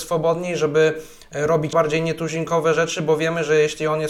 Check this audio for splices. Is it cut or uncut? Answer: cut